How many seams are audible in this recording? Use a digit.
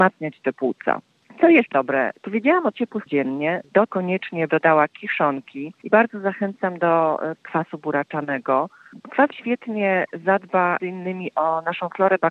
9